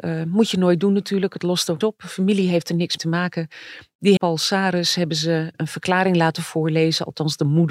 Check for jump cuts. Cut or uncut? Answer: cut